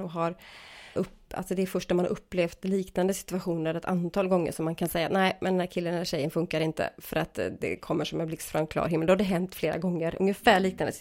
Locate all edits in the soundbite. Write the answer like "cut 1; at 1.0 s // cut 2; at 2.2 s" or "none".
cut 1; at 1.0 s